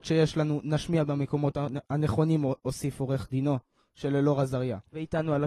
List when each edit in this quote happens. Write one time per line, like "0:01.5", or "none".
none